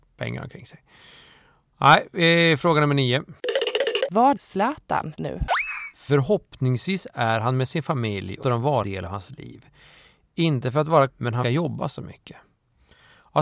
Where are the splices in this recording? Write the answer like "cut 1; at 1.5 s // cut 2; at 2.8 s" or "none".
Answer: cut 1; at 4.4 s // cut 2; at 5.2 s // cut 3; at 8.4 s // cut 4; at 8.8 s // cut 5; at 11.1 s // cut 6; at 11.4 s